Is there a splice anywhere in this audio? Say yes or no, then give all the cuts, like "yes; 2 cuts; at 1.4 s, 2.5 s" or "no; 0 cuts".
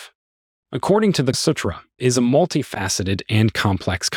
yes; 2 cuts; at 1.3 s, 2.0 s